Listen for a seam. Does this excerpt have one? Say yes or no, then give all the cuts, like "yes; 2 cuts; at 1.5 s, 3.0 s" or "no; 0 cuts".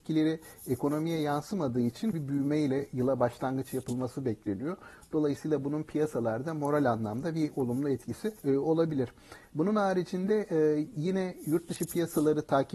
yes; 2 cuts; at 2.1 s, 8.4 s